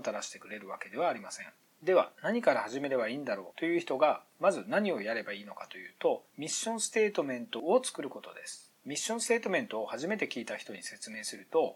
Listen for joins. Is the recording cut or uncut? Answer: uncut